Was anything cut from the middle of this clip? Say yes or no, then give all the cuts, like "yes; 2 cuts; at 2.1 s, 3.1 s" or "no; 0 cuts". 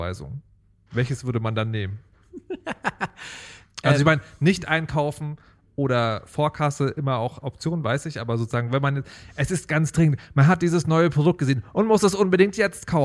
no; 0 cuts